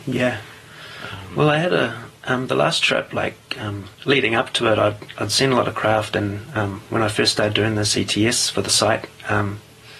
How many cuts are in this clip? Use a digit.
2